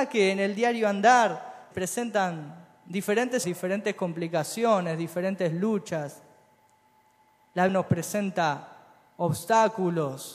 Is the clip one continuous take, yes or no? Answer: no